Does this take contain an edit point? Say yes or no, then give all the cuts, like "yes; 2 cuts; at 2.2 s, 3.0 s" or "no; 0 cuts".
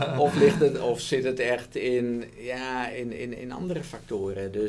no; 0 cuts